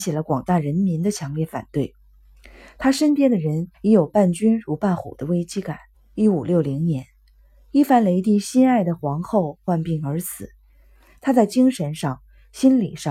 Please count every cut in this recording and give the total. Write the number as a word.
two